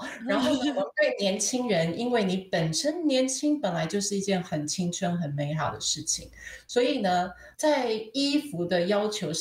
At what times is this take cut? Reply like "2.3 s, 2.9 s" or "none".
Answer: 7.5 s